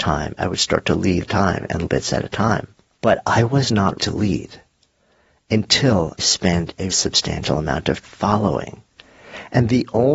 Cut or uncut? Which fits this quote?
cut